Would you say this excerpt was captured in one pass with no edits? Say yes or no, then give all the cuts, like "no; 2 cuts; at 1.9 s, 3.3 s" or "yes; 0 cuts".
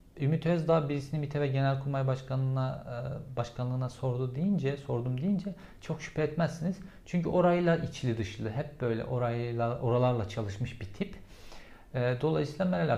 yes; 0 cuts